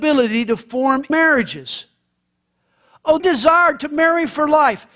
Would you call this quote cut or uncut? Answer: cut